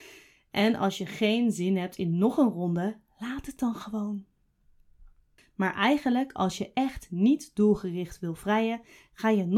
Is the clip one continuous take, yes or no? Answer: yes